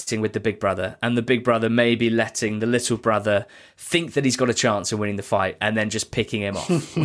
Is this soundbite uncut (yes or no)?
yes